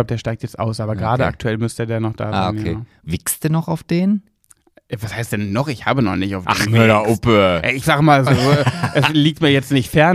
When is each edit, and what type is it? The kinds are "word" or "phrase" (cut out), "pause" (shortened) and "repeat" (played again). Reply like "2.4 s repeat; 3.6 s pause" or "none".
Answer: 6.7 s word; 8.3 s word